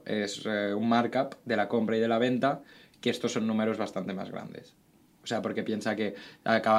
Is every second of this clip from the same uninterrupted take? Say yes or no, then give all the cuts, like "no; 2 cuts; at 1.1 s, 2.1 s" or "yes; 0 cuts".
yes; 0 cuts